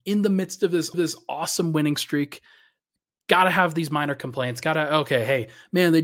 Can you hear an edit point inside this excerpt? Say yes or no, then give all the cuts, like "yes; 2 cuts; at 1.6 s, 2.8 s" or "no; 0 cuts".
yes; 1 cut; at 0.9 s